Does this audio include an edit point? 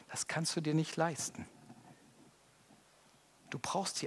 no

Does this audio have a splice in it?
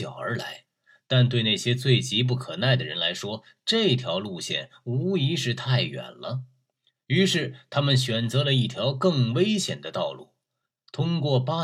no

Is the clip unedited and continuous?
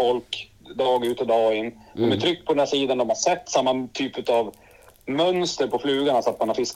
yes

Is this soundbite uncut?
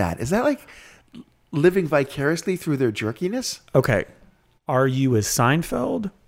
yes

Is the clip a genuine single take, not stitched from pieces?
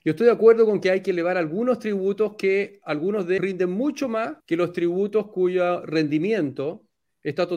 no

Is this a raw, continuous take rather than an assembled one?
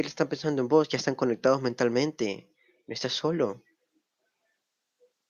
yes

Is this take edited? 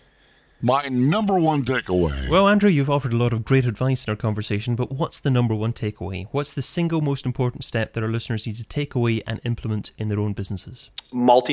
no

